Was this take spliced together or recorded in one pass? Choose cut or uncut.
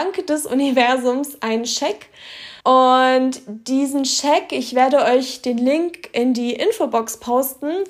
cut